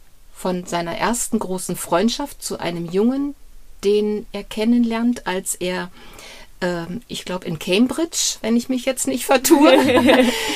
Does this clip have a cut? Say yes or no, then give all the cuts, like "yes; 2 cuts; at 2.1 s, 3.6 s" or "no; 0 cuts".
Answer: no; 0 cuts